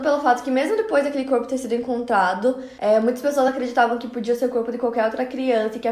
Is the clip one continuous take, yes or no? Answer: yes